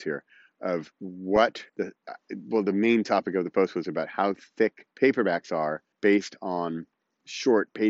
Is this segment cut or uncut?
cut